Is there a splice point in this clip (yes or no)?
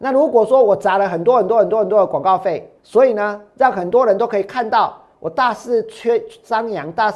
yes